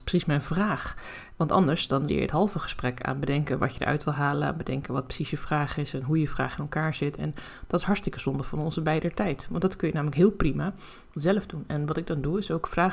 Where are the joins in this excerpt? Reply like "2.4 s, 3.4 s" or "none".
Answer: 2.1 s